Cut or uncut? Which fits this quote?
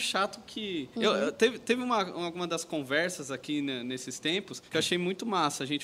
cut